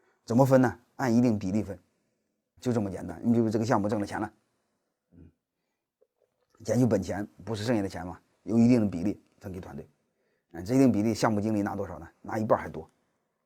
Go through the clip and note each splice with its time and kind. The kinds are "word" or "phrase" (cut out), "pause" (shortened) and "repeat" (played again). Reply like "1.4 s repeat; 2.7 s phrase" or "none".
2.6 s word